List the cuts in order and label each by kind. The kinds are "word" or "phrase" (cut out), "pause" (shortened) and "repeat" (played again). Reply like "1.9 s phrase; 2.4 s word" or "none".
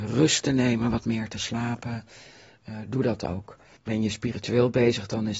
3.8 s pause